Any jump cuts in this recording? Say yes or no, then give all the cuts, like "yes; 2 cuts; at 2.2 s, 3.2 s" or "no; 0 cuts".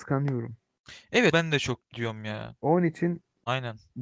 yes; 1 cut; at 1.3 s